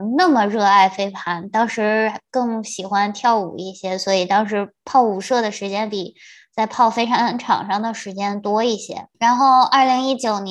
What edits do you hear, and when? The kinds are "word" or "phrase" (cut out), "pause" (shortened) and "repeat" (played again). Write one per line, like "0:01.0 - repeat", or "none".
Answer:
0:09.1 - pause